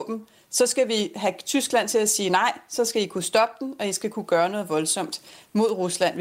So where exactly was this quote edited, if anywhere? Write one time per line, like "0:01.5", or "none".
none